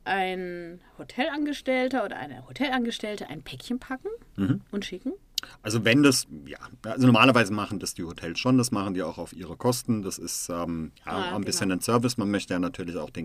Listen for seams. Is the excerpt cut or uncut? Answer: cut